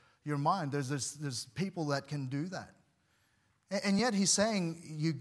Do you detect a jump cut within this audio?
no; 0 cuts

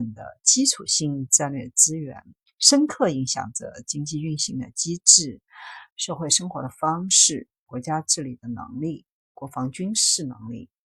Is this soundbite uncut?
yes; 0 cuts

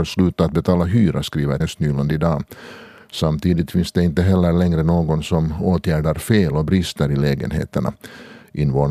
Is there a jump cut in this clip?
yes; 1 cut; at 1.6 s

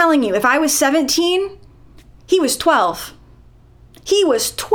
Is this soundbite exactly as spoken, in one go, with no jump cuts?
yes; 0 cuts

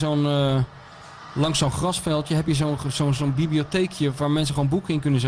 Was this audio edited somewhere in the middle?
no; 0 cuts

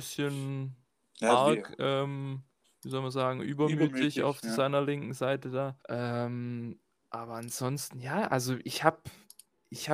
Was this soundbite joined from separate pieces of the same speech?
yes; 2 cuts; at 2.6 s, 5.8 s

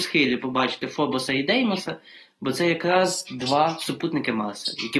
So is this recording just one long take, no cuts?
yes; 0 cuts

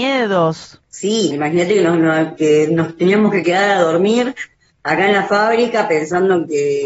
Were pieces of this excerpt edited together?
yes; 2 cuts; at 1.3 s, 2.4 s

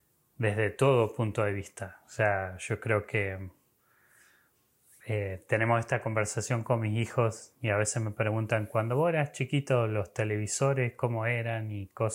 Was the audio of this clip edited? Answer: no; 0 cuts

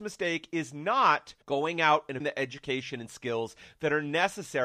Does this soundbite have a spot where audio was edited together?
yes; 2 cuts; at 1.4 s, 2.2 s

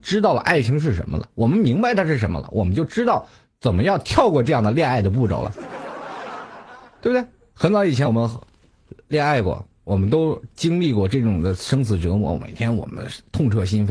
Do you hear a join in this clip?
no; 0 cuts

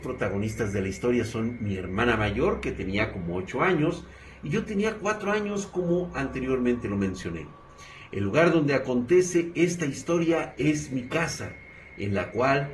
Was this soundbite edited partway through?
no; 0 cuts

